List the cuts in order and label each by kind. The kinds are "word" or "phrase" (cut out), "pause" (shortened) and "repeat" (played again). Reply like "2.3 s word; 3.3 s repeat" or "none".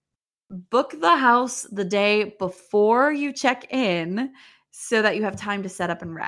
none